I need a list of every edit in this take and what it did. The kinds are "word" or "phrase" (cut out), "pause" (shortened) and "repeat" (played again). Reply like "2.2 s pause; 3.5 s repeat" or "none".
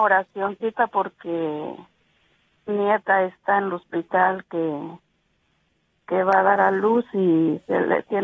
2.7 s word